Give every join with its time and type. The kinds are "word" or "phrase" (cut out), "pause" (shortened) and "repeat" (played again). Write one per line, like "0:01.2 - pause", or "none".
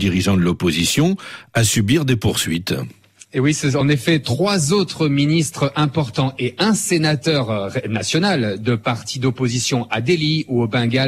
none